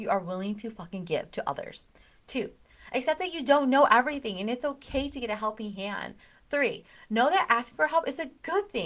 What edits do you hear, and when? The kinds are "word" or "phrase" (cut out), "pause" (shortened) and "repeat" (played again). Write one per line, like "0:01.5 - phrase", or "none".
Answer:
none